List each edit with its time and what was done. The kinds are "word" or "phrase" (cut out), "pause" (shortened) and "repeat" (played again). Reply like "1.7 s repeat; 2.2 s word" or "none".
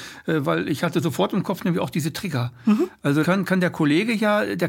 3.2 s word